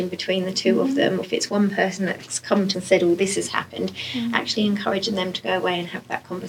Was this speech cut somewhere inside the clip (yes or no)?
yes